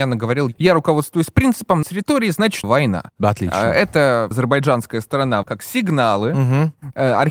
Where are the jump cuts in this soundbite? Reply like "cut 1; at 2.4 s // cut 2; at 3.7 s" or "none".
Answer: cut 1; at 1.8 s // cut 2; at 2.6 s // cut 3; at 4.3 s // cut 4; at 5.4 s